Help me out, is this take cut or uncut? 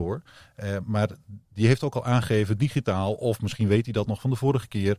uncut